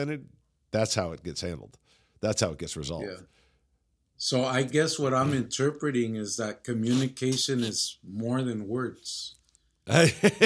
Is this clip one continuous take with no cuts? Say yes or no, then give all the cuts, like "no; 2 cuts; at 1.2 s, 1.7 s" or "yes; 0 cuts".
yes; 0 cuts